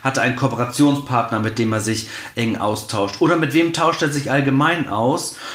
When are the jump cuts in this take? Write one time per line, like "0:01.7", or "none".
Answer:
none